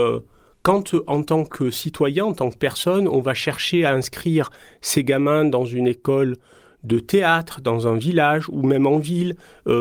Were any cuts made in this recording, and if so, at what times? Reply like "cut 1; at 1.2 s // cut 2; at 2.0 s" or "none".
none